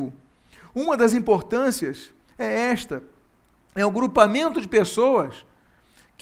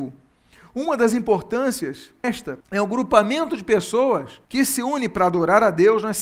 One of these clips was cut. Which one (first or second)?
second